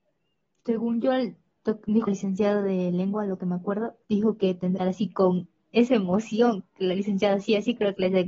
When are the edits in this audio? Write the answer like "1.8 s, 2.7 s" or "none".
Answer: 2.1 s, 4.0 s, 4.8 s